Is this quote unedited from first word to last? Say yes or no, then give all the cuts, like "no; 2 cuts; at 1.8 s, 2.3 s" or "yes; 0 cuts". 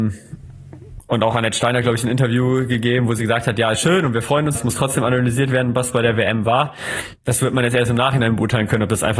no; 1 cut; at 4.5 s